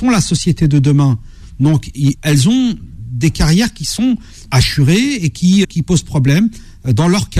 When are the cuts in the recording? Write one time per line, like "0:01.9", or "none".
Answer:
0:02.1
0:04.5
0:05.6